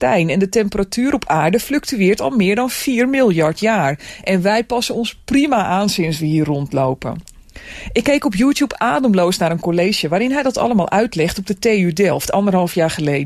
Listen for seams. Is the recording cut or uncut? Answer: uncut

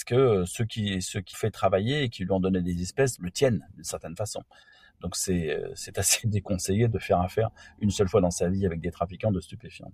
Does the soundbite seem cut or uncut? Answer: cut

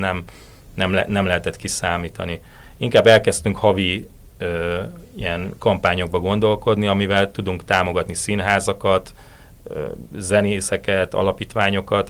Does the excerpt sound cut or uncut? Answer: uncut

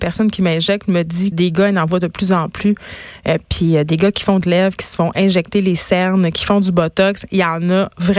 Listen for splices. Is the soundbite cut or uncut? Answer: cut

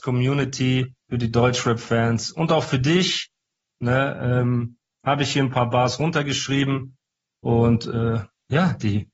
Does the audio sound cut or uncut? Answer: cut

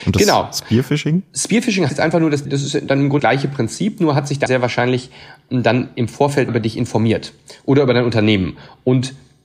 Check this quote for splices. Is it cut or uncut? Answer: cut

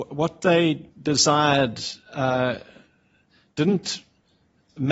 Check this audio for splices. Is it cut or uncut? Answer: cut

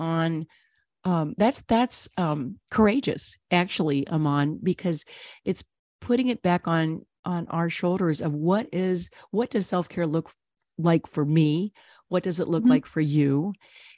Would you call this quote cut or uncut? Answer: uncut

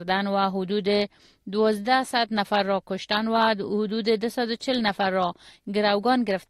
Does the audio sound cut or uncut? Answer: uncut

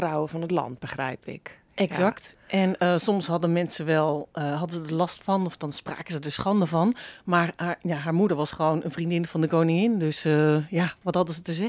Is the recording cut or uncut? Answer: uncut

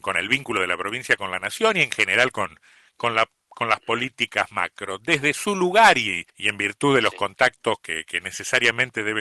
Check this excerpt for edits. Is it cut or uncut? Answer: cut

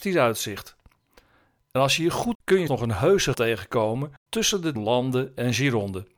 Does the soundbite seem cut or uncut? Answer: cut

